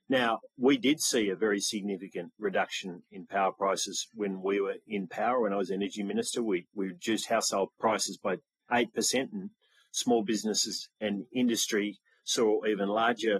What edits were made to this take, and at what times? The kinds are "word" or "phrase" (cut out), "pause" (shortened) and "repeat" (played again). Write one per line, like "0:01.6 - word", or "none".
none